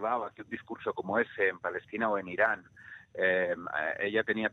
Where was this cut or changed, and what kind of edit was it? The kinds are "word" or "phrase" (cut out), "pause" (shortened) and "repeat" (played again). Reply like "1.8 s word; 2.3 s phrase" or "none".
none